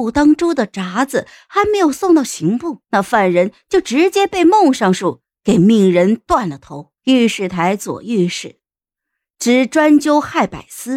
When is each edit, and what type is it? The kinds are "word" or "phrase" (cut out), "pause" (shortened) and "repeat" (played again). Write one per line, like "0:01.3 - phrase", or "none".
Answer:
0:02.8 - pause
0:07.0 - pause